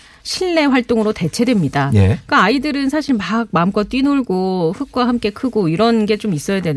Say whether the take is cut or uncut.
uncut